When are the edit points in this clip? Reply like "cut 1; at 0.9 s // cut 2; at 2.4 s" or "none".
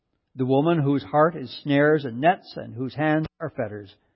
none